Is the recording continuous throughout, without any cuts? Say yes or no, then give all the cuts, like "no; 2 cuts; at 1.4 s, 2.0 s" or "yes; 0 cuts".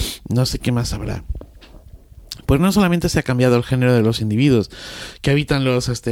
yes; 0 cuts